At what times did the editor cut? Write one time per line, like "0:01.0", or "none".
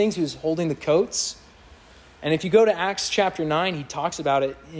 none